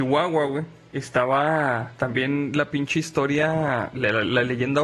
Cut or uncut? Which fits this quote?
uncut